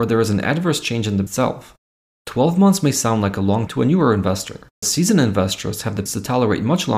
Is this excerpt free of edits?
no; 4 cuts; at 1.3 s, 3.7 s, 4.8 s, 6.1 s

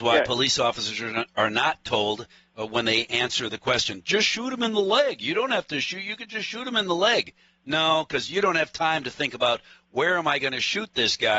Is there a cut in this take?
no; 0 cuts

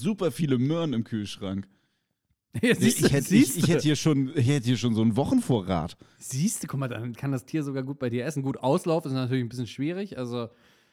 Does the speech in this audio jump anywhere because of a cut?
no; 0 cuts

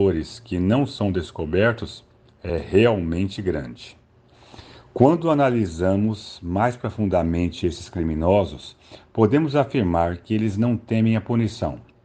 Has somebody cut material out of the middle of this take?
no; 0 cuts

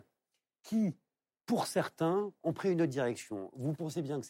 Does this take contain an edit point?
no; 0 cuts

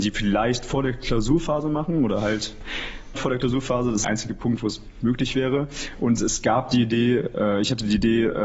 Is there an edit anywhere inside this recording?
yes; 2 cuts; at 3.1 s, 4.0 s

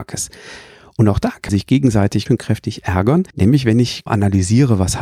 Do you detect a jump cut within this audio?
yes; 4 cuts; at 1.5 s, 2.3 s, 3.3 s, 4.1 s

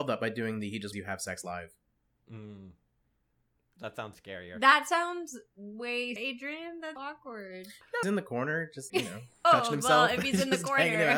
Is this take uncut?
no; 7 cuts; at 0.9 s, 4.1 s, 6.2 s, 7.0 s, 8.0 s, 8.9 s, 9.4 s

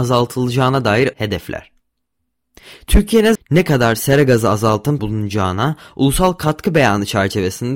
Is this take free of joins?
no; 3 cuts; at 1.1 s, 3.3 s, 5.0 s

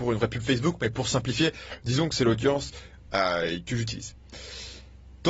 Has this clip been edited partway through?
no; 0 cuts

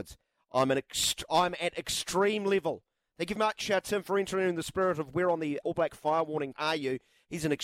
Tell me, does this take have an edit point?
yes; 3 cuts; at 3.4 s, 5.6 s, 6.5 s

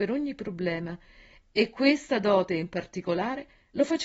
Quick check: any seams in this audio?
no; 0 cuts

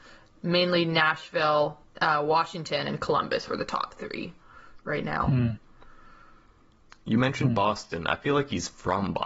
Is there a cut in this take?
no; 0 cuts

